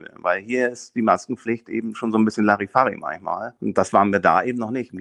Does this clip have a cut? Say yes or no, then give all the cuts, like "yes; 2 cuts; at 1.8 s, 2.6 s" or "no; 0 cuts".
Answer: yes; 1 cut; at 3.6 s